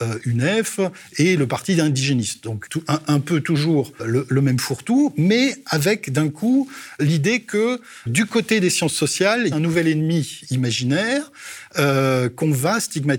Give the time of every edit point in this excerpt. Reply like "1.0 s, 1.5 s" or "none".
2.7 s, 4.0 s, 7.0 s, 8.1 s, 9.5 s